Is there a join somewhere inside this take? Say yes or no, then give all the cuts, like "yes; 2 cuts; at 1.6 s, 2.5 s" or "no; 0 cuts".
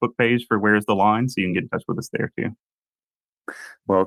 no; 0 cuts